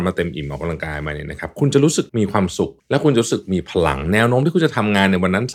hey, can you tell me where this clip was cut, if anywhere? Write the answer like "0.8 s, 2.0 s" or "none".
2.1 s, 2.8 s